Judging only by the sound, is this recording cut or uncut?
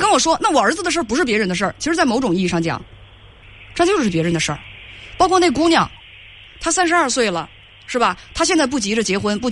uncut